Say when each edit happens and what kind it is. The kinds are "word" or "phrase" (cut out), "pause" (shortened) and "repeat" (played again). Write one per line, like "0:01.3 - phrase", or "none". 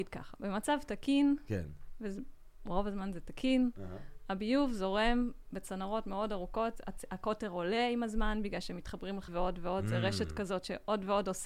0:09.3 - word